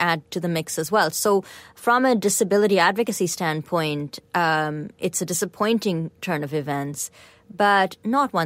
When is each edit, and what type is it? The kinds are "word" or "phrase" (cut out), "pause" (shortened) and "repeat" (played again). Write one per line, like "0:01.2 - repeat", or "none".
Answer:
none